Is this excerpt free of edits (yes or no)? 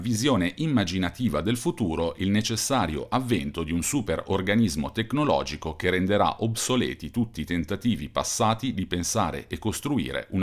yes